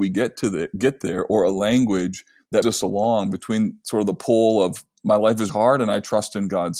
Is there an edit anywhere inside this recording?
yes; 2 cuts; at 2.6 s, 5.5 s

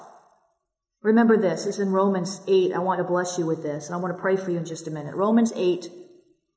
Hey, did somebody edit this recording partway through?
no; 0 cuts

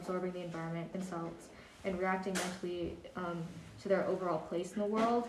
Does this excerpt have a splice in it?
yes; 1 cut; at 0.9 s

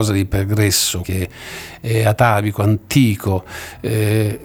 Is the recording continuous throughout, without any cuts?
no; 1 cut; at 1.0 s

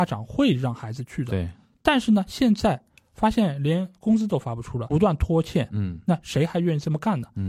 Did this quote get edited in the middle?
yes; 1 cut; at 4.9 s

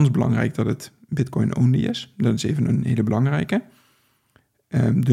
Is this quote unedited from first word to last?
yes; 0 cuts

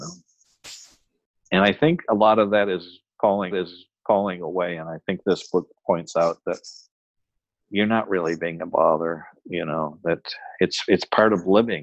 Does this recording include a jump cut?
yes; 1 cut; at 3.5 s

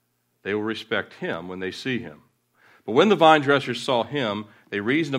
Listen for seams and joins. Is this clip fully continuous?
yes; 0 cuts

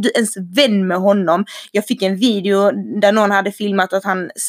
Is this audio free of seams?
yes; 0 cuts

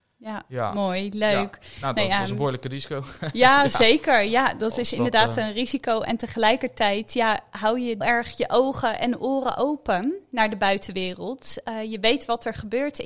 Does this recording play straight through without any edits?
no; 1 cut; at 8.0 s

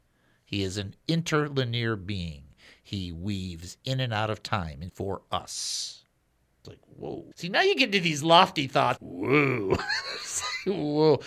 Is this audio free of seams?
no; 3 cuts; at 4.9 s, 7.3 s, 9.0 s

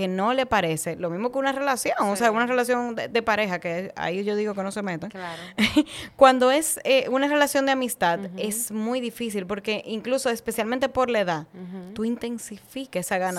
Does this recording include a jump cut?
no; 0 cuts

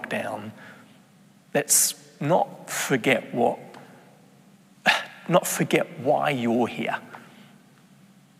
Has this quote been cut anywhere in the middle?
no; 0 cuts

